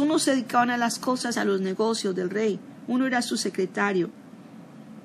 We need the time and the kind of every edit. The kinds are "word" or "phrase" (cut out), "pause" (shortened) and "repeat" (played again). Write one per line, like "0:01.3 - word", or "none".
0:01.3 - phrase

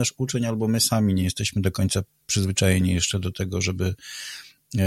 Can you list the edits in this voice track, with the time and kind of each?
none

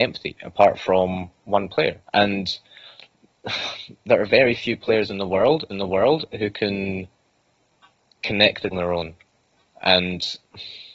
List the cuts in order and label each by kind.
0:01.4 - pause
0:02.0 - pause
0:05.7 - repeat
0:08.7 - phrase

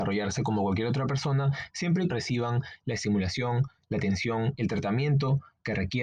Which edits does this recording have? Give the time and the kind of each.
0:02.1 - word

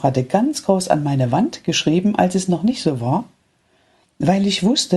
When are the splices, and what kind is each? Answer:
none

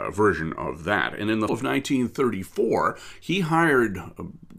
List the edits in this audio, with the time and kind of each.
0:01.5 - word

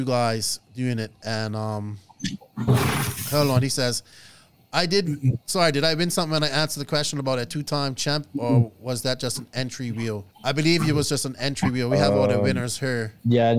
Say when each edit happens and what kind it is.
0:10.3 - pause

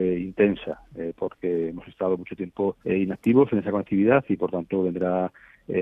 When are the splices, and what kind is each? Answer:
0:02.8 - pause

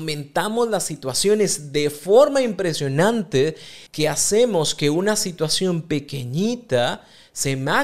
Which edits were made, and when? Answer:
0:03.9 - pause

